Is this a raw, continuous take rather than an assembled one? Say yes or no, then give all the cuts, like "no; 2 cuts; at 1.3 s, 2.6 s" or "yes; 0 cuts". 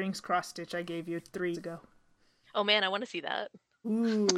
no; 1 cut; at 1.5 s